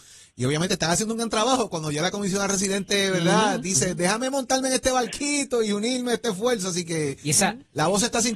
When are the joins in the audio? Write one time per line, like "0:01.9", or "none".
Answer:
none